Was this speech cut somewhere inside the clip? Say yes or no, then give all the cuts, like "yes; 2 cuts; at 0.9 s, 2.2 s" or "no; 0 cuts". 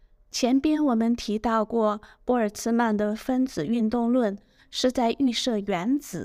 no; 0 cuts